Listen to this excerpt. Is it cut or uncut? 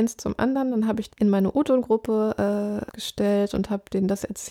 cut